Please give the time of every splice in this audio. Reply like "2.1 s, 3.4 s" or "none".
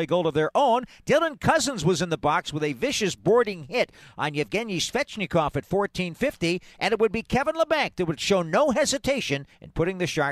none